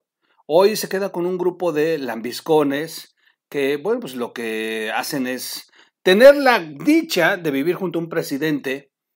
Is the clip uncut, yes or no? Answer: yes